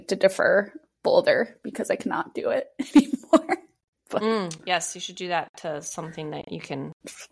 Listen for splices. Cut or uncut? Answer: uncut